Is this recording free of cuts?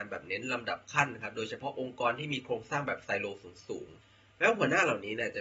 no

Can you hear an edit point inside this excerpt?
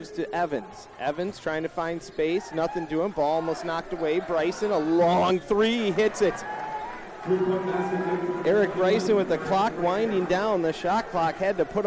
no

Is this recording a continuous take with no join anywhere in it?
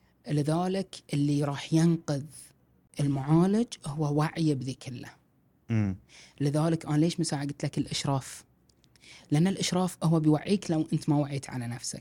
yes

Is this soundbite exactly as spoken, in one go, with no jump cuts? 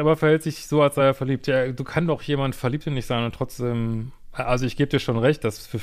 yes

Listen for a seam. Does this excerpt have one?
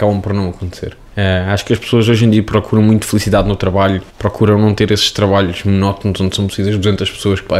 yes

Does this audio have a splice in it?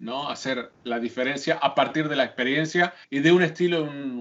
yes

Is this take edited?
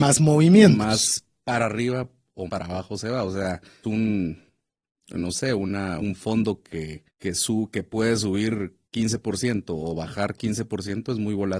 yes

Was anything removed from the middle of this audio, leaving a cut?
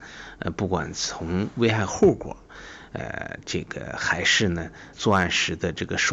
yes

